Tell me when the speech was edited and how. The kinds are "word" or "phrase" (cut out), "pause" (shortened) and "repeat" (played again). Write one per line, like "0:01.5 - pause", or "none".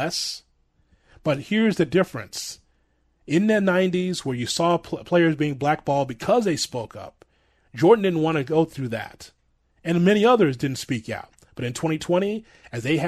none